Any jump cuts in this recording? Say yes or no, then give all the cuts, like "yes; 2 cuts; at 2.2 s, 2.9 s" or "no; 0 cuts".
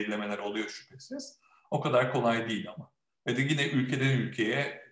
no; 0 cuts